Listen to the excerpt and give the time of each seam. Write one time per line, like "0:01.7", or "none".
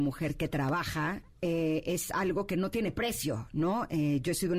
none